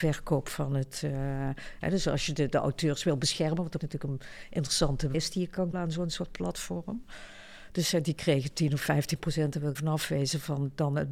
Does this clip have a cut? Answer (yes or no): yes